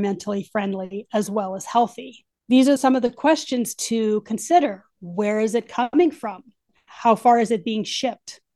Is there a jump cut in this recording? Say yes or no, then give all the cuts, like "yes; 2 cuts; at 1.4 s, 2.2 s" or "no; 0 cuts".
no; 0 cuts